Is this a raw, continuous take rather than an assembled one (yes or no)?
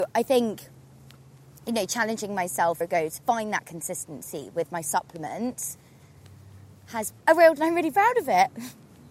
no